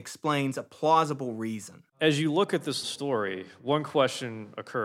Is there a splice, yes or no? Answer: yes